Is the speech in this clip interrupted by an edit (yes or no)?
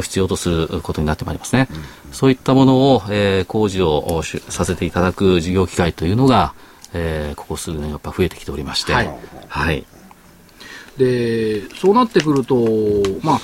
no